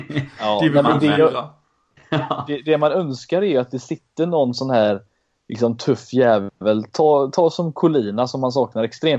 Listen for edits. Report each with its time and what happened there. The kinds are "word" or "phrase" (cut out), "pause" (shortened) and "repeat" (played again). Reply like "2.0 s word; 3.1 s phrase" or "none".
none